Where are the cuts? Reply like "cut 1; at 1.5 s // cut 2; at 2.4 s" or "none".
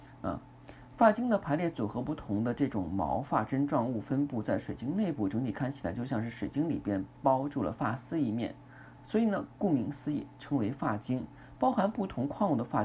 cut 1; at 9.0 s